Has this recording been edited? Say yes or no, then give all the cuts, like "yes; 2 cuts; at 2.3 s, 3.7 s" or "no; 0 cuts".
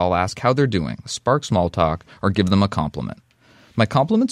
no; 0 cuts